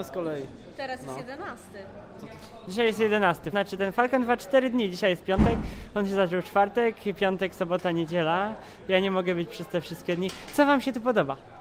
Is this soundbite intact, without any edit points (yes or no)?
no